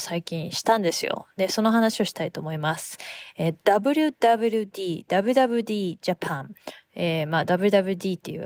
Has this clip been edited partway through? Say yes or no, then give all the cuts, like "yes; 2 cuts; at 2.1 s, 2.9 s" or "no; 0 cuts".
no; 0 cuts